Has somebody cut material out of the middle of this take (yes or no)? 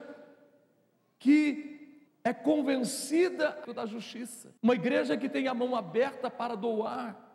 yes